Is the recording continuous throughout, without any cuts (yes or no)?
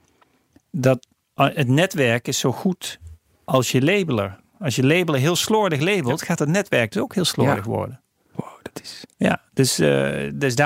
yes